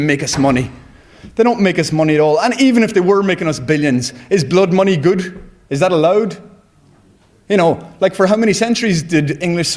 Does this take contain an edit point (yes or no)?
no